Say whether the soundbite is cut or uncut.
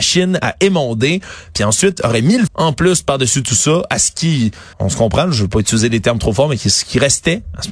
cut